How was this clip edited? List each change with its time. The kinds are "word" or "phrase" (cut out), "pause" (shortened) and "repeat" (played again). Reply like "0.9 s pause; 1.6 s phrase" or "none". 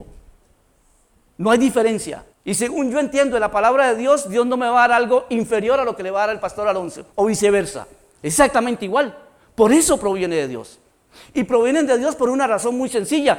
2.3 s pause; 7.1 s pause